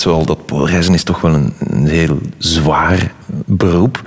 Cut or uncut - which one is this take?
uncut